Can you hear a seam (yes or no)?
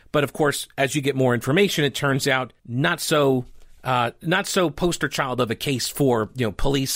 yes